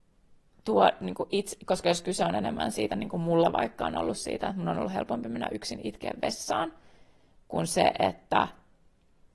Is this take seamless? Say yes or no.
yes